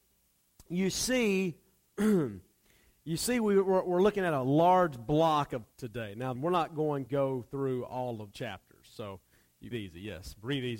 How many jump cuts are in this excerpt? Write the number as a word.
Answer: five